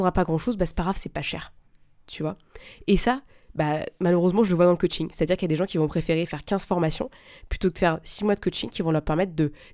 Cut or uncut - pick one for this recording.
uncut